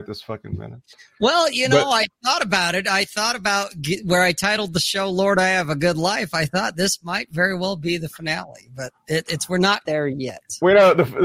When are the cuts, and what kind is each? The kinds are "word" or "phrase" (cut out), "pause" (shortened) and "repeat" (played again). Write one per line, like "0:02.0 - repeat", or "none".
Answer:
0:09.8 - word